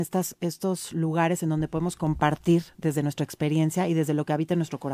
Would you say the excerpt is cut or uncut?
uncut